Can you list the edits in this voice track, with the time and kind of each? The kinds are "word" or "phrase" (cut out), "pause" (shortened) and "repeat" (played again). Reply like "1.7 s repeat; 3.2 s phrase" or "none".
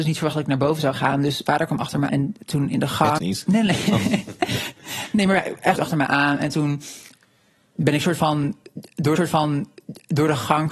1.5 s word; 2.1 s word; 3.2 s phrase; 5.8 s word; 9.2 s repeat